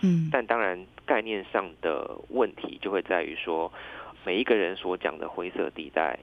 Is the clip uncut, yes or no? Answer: no